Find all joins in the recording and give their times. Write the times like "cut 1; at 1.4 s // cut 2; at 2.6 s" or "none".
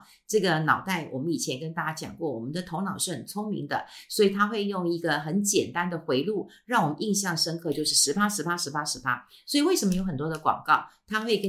none